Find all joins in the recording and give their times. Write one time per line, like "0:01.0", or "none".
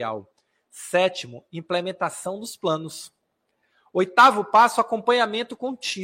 none